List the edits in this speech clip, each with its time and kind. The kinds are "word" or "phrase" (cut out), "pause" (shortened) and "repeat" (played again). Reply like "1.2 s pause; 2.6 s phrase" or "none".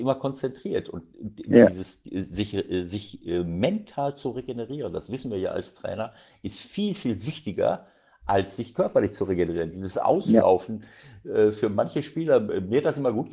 none